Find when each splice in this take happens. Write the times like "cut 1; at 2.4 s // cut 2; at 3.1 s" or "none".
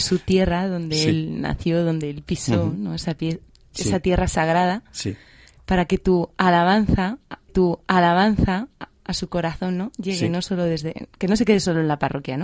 cut 1; at 7.5 s